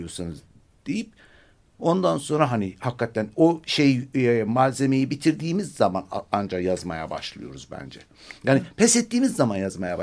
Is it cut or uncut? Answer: uncut